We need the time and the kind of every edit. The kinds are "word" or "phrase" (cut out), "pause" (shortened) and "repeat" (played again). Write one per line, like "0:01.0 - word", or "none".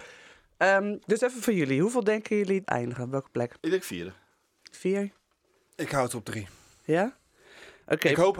0:02.6 - phrase
0:03.6 - pause
0:04.7 - word